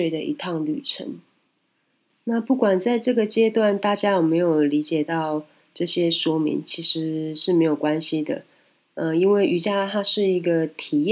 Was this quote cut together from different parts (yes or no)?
no